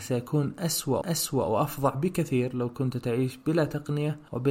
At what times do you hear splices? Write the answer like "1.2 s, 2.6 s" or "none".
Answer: 1.0 s